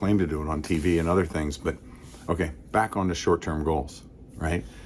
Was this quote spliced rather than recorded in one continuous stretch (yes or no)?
no